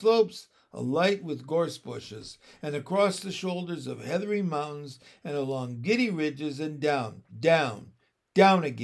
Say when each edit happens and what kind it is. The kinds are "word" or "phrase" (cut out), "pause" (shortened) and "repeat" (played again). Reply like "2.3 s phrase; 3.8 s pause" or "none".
7.3 s pause